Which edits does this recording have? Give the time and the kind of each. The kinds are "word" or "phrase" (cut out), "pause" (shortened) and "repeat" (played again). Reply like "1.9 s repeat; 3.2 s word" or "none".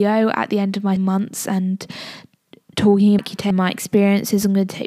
1.0 s word; 3.2 s word; 3.5 s word

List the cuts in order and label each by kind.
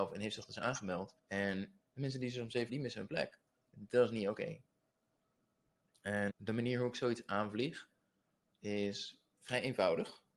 1.2 s pause; 2.7 s phrase; 3.6 s pause; 6.3 s word

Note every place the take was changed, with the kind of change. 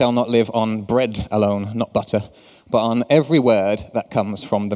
none

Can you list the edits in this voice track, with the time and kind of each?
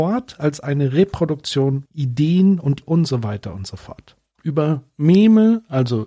1.9 s word; 2.8 s word

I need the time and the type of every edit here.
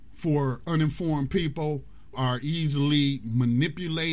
2.1 s word

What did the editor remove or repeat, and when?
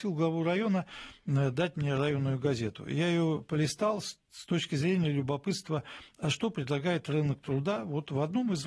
none

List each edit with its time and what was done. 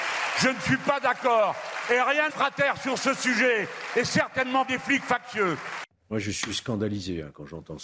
2.3 s phrase; 4.6 s word

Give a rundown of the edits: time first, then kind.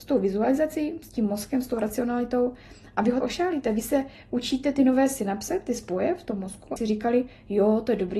3.2 s word; 6.8 s word

